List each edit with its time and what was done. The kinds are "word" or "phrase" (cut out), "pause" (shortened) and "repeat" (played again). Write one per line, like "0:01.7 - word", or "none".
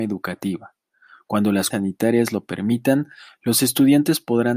0:01.7 - word